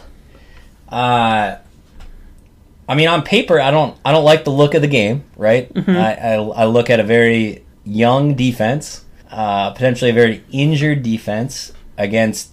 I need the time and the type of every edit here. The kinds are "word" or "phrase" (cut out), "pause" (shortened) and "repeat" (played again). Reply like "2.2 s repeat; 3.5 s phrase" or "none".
2.5 s pause; 5.3 s pause; 7.7 s pause; 9.2 s pause